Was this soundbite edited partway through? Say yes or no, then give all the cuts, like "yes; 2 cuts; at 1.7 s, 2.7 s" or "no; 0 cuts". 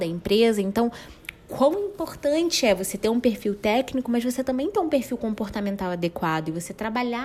no; 0 cuts